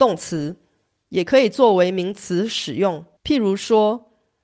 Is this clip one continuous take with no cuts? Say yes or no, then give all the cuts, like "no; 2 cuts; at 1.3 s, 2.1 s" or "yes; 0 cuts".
no; 1 cut; at 3.2 s